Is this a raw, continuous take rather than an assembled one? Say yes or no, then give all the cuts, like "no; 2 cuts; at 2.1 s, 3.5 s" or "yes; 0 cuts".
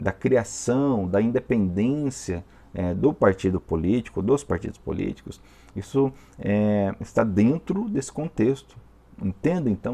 yes; 0 cuts